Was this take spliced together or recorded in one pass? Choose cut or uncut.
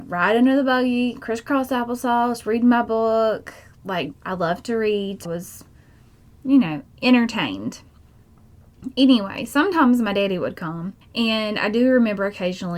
cut